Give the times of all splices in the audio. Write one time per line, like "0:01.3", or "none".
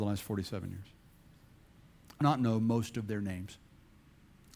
0:02.2